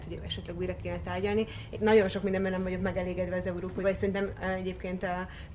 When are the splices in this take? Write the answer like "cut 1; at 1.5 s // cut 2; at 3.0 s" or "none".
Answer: cut 1; at 1.7 s // cut 2; at 3.8 s